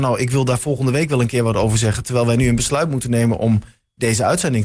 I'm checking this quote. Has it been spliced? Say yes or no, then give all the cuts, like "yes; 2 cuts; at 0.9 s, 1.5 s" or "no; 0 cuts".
no; 0 cuts